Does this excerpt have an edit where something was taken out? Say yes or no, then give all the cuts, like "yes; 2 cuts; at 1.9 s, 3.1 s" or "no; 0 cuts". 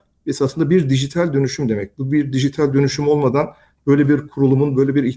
no; 0 cuts